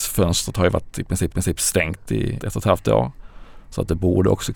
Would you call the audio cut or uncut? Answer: cut